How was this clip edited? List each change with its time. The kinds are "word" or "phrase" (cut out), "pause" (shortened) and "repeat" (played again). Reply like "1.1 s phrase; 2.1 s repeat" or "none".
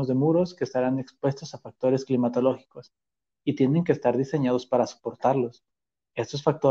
none